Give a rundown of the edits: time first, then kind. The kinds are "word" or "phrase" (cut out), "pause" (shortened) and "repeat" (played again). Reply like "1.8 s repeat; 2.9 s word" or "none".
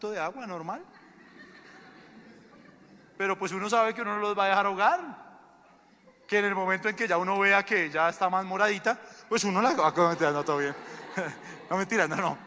none

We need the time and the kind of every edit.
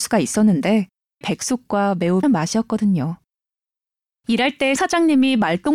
1.2 s word; 2.2 s word; 4.8 s word

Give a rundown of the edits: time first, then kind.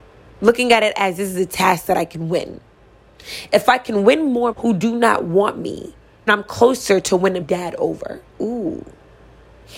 4.5 s word; 6.3 s word; 7.4 s word

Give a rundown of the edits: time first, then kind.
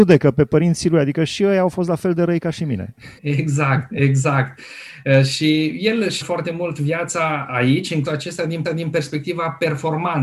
3.2 s pause; 6.2 s word; 8.0 s word; 8.6 s repeat

